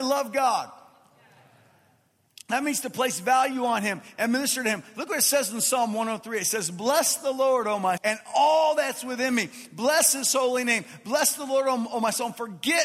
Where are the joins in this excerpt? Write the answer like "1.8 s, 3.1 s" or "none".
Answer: 8.0 s